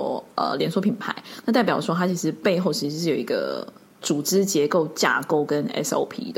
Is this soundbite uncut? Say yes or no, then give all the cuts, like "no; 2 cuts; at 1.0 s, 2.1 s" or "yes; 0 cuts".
yes; 0 cuts